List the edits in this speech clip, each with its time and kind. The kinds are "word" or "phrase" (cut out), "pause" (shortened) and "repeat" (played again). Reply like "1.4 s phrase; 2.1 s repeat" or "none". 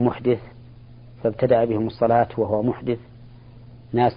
none